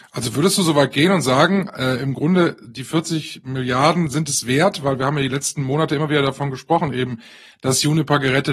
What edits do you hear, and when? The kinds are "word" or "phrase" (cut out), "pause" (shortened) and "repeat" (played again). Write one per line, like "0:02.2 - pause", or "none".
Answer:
none